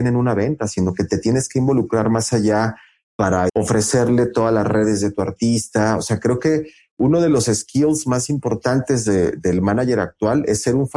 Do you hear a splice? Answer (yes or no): yes